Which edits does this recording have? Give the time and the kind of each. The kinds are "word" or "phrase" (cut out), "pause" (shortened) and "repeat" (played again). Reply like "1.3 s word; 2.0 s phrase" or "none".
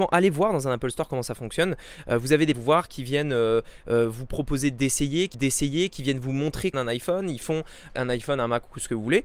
2.5 s phrase; 5.3 s repeat; 6.7 s phrase; 7.9 s word

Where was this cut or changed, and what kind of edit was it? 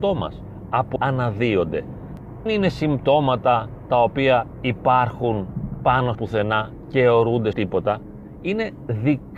1.0 s word; 2.5 s word; 6.1 s word; 7.5 s word

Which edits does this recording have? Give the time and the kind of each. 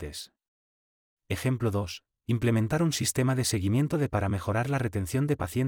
4.1 s word

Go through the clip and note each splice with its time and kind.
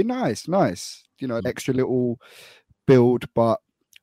1.4 s word

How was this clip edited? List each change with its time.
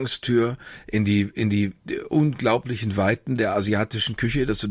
none

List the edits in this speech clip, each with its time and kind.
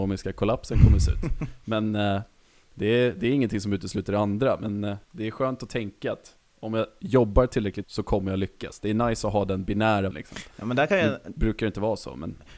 5.0 s pause; 7.8 s word; 10.1 s word

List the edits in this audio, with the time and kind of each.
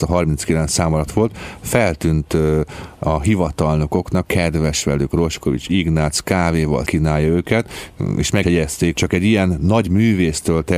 4.3 s phrase; 6.8 s word; 8.4 s word; 8.9 s word

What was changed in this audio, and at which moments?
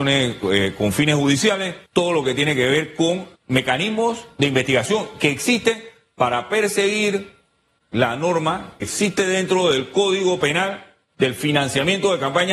1.9 s pause; 3.4 s pause; 8.8 s phrase

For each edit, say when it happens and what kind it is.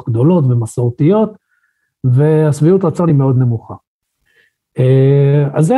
none

